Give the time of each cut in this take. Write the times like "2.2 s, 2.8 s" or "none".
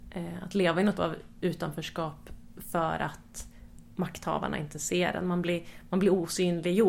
0.9 s

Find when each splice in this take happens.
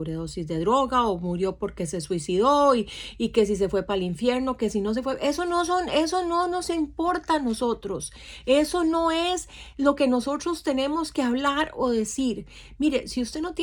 none

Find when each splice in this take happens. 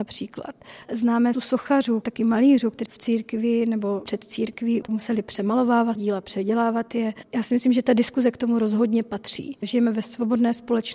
1.3 s, 2.0 s, 2.9 s, 4.1 s, 4.8 s, 6.0 s

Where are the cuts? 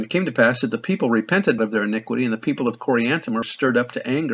1.6 s, 3.4 s

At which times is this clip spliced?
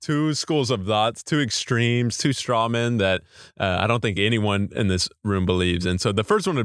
none

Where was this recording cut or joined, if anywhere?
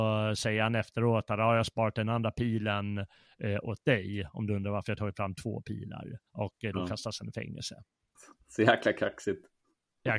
6.3 s, 8.1 s

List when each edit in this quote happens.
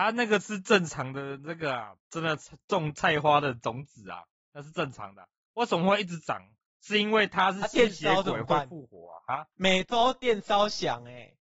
2.0 s, 9.5 s

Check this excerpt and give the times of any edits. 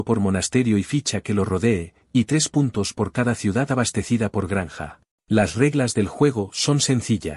5.1 s

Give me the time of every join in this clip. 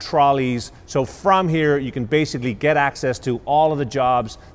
none

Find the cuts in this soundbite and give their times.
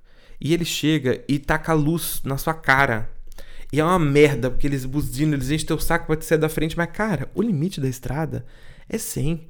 none

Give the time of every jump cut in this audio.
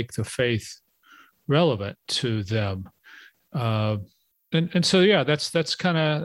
none

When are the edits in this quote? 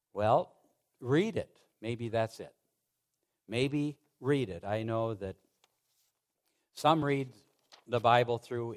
none

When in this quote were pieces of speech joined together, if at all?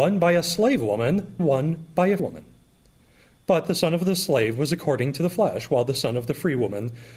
1.4 s, 2.2 s

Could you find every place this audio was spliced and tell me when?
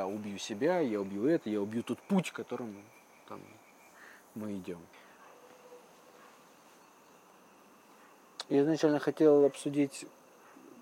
none

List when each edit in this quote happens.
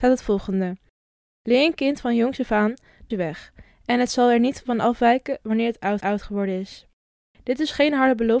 3.1 s, 6.0 s

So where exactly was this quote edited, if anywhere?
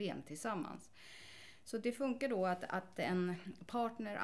none

